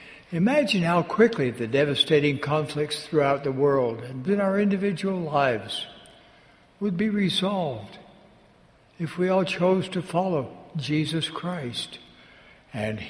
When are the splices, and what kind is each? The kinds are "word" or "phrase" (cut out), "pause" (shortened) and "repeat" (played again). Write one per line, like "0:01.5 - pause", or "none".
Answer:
0:04.3 - word